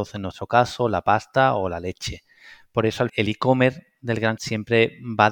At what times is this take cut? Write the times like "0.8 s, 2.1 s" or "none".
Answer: 3.1 s, 4.4 s